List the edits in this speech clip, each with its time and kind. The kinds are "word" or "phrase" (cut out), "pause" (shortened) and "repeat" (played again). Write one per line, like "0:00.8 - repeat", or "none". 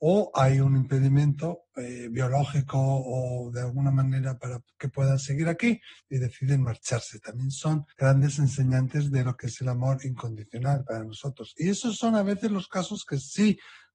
0:06.0 - pause
0:07.9 - pause